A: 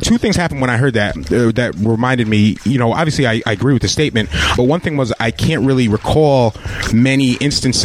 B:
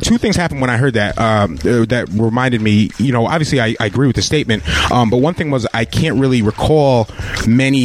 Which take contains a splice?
A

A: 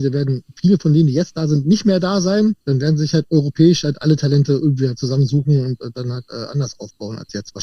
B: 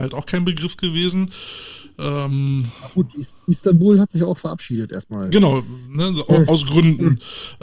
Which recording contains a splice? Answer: A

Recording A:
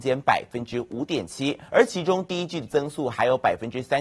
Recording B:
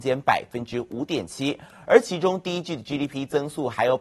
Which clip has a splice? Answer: A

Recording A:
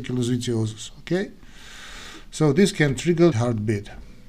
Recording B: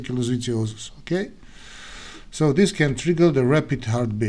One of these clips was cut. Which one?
A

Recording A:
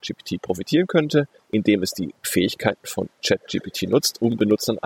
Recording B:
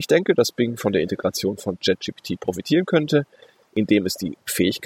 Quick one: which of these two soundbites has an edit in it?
A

